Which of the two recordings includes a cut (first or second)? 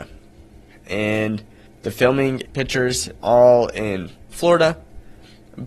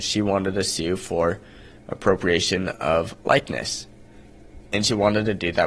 first